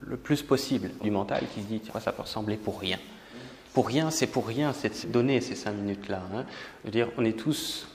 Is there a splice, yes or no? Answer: yes